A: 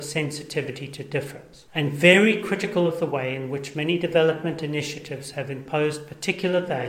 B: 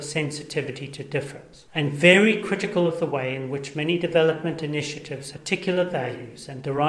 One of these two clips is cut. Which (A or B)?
B